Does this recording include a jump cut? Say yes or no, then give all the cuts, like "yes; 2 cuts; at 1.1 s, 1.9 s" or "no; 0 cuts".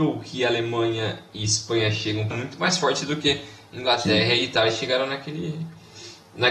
yes; 1 cut; at 2.3 s